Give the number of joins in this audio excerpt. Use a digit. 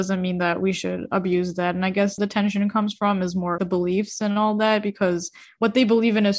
2